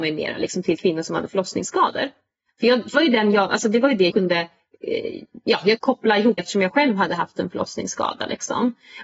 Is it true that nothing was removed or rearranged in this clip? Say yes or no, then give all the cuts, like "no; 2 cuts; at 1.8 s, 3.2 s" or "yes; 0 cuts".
no; 4 cuts; at 2.9 s, 4.1 s, 5.8 s, 6.4 s